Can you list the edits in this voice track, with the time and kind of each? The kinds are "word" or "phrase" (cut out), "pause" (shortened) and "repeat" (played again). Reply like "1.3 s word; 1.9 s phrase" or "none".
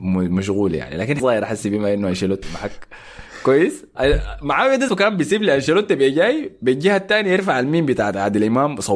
1.2 s word; 2.4 s word; 4.9 s word